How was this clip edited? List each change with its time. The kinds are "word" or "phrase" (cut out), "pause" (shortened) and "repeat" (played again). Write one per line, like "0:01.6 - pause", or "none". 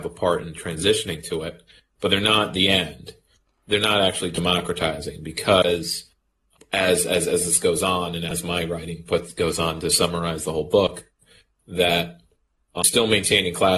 none